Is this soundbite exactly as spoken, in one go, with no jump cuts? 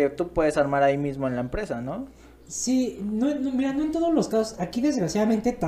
yes; 0 cuts

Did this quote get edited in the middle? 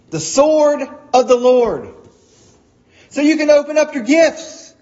no; 0 cuts

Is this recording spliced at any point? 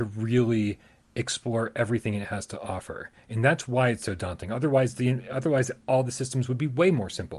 no; 0 cuts

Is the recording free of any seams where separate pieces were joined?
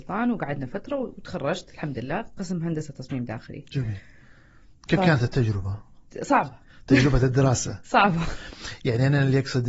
yes; 0 cuts

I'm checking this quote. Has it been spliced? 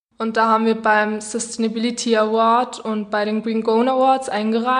no; 0 cuts

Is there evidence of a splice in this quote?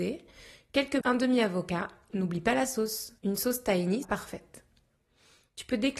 yes; 4 cuts; at 1.0 s, 2.1 s, 3.2 s, 4.0 s

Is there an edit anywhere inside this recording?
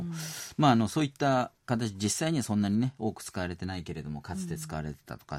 yes; 1 cut; at 1.6 s

